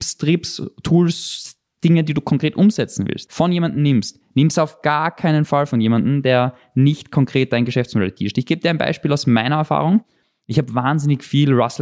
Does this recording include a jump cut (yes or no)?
no